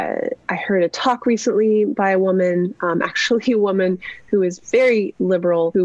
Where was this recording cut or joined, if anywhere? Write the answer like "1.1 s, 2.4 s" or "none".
none